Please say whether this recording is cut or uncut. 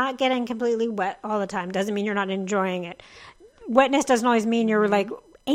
uncut